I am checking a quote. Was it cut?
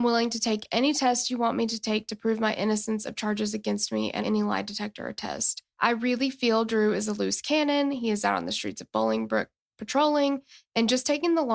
yes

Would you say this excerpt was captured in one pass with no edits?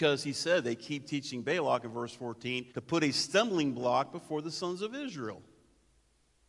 no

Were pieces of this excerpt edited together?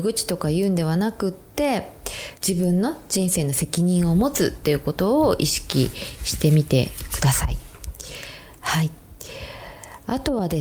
yes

